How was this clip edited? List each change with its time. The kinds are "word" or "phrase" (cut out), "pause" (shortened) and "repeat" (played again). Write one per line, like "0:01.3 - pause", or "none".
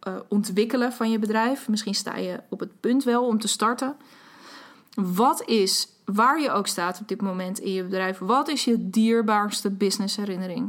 none

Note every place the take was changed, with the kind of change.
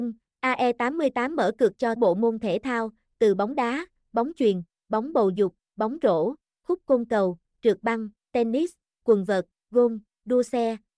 0:02.0 - phrase

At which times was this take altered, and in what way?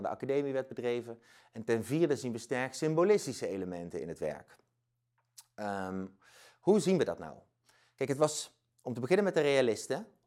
none

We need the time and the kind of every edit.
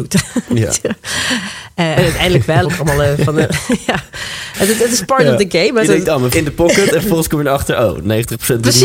0:02.6 - phrase
0:05.8 - word
0:06.3 - word

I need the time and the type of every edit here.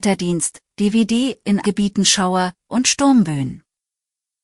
0:01.6 - word
0:02.7 - word

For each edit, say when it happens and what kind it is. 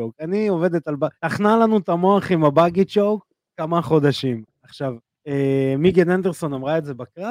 0:01.2 - pause
0:05.1 - pause

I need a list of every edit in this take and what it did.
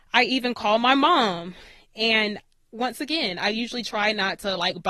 none

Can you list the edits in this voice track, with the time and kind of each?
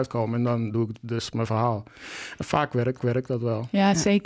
0:03.0 - repeat

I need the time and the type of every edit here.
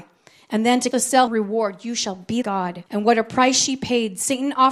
0:00.9 - word
0:01.3 - phrase
0:02.4 - word
0:02.9 - pause

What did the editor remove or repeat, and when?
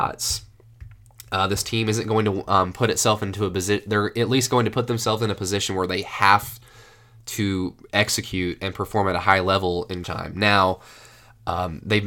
0:10.0 - word

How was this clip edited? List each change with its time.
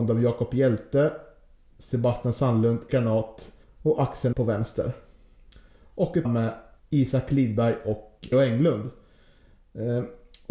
0:01.6 - pause
0:02.9 - word
0:03.6 - pause
0:04.3 - word
0:06.2 - word
0:06.8 - pause
0:08.3 - word

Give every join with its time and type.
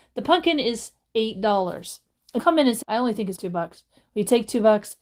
0:02.4 - word
0:02.8 - word
0:03.4 - word

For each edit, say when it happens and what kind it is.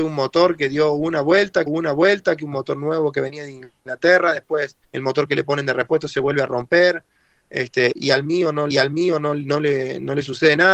0:01.7 - repeat
0:04.8 - pause
0:08.7 - repeat

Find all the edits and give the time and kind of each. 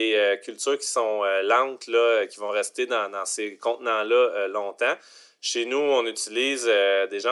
none

